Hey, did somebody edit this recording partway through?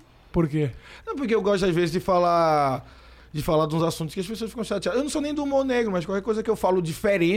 no; 0 cuts

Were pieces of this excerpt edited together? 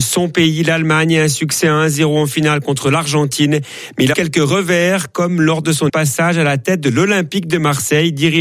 yes; 2 cuts; at 4.1 s, 5.9 s

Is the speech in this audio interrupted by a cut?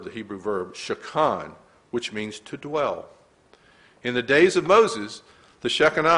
no; 0 cuts

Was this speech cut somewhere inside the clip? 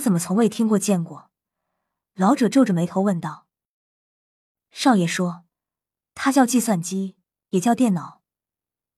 no; 0 cuts

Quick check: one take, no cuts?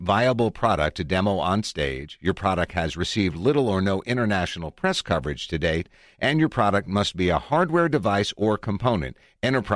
yes; 0 cuts

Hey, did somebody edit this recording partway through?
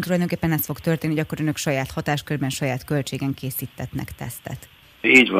no; 0 cuts

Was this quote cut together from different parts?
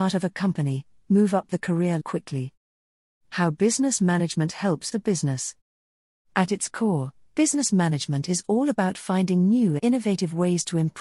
yes; 3 cuts; at 2.0 s, 4.9 s, 9.8 s

